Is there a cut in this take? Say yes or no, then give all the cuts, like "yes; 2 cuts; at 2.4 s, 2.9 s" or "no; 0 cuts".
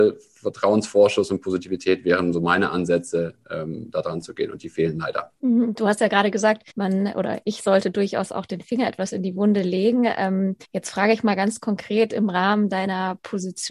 yes; 3 cuts; at 5.4 s, 6.7 s, 10.6 s